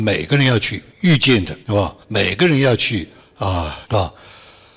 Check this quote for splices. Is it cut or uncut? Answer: cut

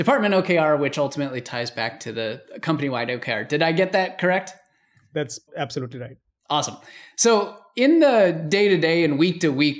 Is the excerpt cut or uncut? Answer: uncut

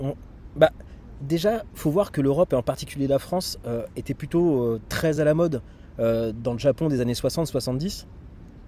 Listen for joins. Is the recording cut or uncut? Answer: uncut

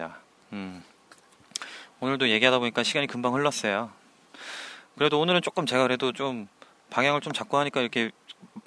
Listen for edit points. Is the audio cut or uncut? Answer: uncut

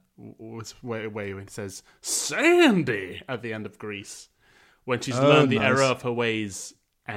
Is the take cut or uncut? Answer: uncut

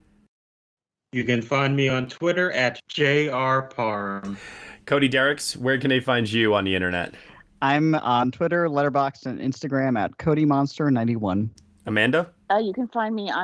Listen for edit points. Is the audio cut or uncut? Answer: uncut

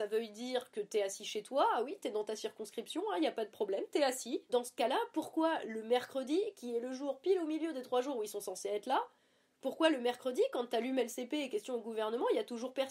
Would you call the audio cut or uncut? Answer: uncut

